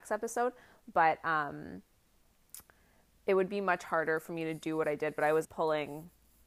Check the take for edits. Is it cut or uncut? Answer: cut